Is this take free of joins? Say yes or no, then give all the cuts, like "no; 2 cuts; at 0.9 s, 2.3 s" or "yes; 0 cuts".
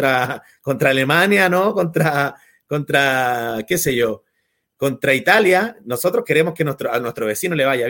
yes; 0 cuts